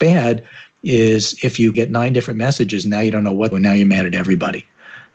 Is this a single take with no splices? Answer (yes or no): no